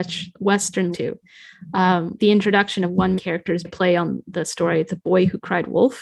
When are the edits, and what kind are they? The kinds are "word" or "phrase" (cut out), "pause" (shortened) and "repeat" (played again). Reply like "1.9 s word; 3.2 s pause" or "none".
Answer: 0.9 s phrase; 2.2 s word; 3.2 s word; 3.6 s word